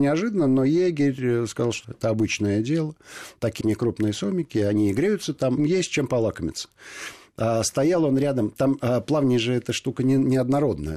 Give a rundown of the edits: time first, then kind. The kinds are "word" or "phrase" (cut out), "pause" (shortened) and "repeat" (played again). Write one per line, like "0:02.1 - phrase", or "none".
0:01.8 - word
0:03.6 - word
0:05.6 - word